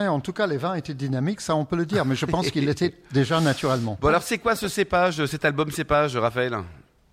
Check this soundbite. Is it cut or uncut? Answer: uncut